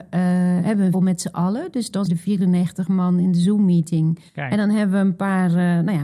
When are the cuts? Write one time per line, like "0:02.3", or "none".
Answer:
0:00.9
0:02.1
0:04.3